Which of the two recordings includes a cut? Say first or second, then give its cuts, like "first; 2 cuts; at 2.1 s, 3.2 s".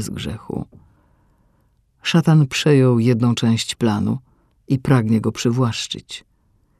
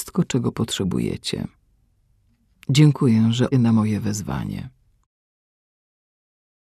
second; 1 cut; at 3.5 s